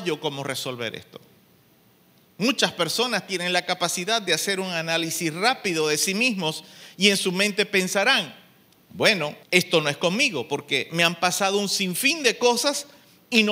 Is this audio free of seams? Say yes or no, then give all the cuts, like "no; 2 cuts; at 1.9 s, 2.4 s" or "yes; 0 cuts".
no; 1 cut; at 9.4 s